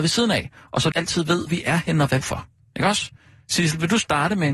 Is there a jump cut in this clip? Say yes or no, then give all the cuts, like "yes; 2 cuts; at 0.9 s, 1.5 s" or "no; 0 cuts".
yes; 3 cuts; at 0.9 s, 1.5 s, 2.2 s